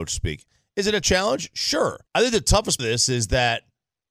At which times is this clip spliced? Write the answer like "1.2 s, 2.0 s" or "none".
1.0 s, 2.1 s, 2.8 s